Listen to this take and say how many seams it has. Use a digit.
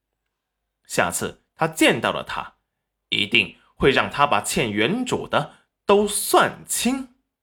0